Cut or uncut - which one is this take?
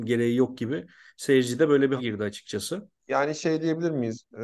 cut